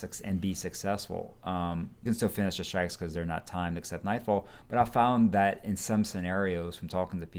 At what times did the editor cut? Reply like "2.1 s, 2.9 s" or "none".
2.1 s